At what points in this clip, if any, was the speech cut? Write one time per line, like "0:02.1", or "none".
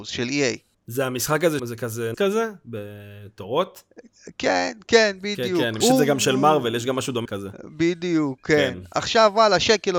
0:01.6
0:02.1
0:05.8
0:07.3